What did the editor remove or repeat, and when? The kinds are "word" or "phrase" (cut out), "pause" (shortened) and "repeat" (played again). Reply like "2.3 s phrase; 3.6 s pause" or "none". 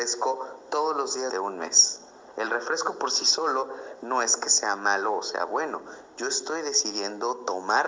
1.3 s word